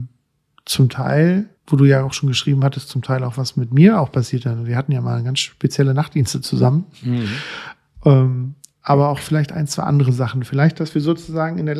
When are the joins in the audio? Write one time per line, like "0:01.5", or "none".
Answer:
0:01.6